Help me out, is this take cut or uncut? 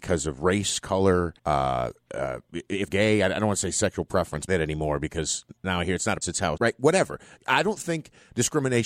cut